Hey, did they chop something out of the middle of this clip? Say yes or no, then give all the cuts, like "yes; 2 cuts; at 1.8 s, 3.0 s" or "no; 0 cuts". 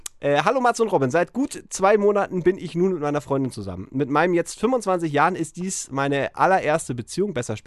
no; 0 cuts